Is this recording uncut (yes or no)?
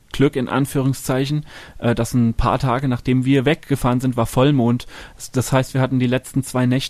yes